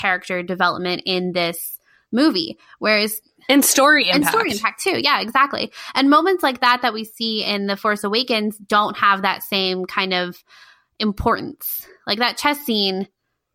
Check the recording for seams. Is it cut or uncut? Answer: uncut